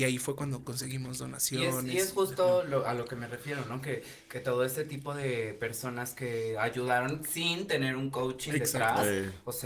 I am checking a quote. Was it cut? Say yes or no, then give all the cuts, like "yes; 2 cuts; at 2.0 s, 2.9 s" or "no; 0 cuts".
no; 0 cuts